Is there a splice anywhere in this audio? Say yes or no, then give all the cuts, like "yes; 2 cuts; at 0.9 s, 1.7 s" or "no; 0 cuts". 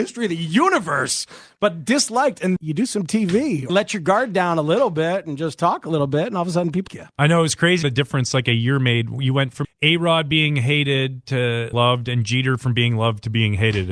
yes; 6 cuts; at 2.6 s, 3.7 s, 6.9 s, 7.8 s, 9.6 s, 11.7 s